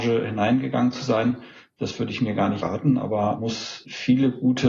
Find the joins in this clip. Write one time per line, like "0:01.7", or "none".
0:02.6
0:03.4